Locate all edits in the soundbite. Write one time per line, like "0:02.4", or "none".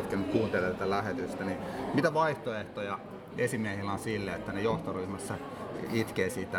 none